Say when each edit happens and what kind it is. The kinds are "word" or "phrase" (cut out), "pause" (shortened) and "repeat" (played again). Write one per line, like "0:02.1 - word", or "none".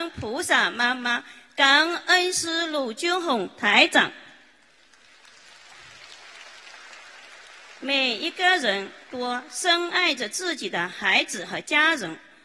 none